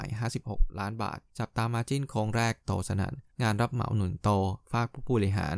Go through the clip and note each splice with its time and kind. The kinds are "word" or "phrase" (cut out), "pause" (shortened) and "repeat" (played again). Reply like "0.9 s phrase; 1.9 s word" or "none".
1.3 s pause; 3.3 s pause